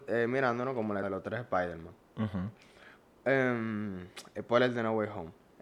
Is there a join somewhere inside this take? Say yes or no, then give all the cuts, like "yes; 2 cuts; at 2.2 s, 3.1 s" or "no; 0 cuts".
yes; 1 cut; at 1.0 s